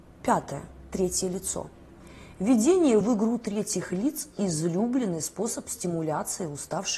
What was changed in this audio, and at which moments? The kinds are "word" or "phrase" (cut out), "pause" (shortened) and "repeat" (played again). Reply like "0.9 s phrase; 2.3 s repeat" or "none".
none